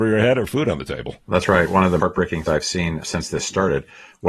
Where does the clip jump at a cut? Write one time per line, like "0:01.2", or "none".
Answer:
0:01.2
0:02.0
0:02.5
0:03.0